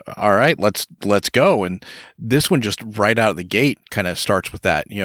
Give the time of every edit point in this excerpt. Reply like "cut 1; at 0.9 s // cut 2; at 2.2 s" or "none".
none